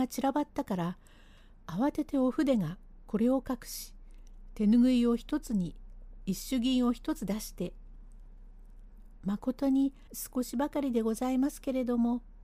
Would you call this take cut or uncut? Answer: cut